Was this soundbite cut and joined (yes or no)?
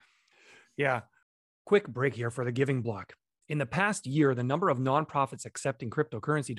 no